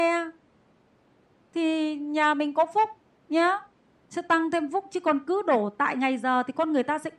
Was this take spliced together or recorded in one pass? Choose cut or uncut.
uncut